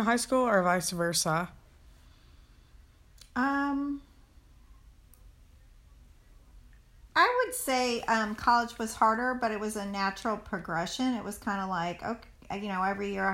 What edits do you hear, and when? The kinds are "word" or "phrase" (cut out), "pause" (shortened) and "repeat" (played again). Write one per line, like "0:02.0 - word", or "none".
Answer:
none